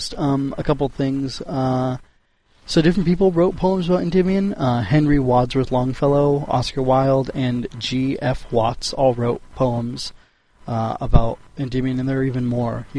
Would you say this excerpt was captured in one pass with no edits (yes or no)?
yes